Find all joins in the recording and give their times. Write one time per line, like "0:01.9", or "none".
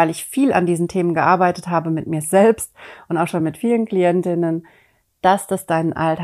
none